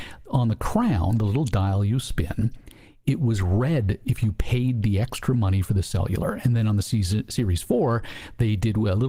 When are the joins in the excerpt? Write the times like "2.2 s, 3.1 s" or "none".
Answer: none